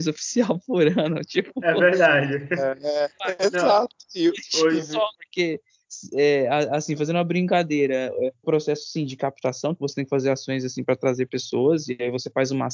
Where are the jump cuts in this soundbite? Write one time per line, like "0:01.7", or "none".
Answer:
0:05.1
0:08.4